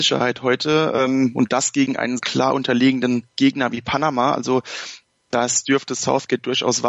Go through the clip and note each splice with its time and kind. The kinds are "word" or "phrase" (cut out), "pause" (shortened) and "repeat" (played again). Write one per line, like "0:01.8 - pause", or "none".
0:02.2 - word